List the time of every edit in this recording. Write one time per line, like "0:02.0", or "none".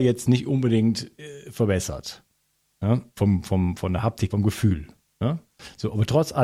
0:04.3